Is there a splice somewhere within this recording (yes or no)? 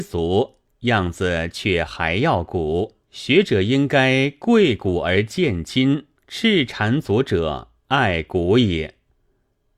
yes